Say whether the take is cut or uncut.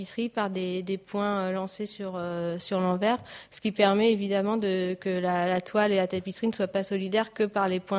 uncut